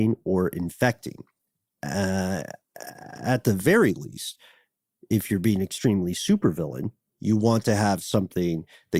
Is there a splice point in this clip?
no; 0 cuts

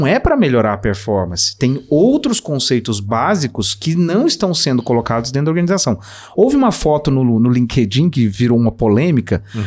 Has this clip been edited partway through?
no; 0 cuts

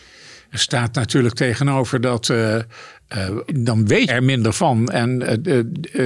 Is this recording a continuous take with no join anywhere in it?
no; 2 cuts; at 3.5 s, 4.1 s

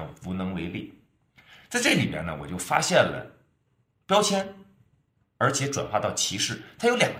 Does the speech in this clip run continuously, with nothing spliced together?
yes; 0 cuts

